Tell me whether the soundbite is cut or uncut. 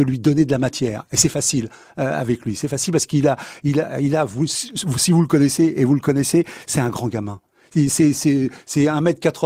uncut